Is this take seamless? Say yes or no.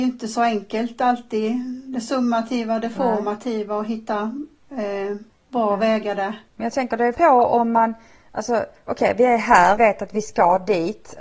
no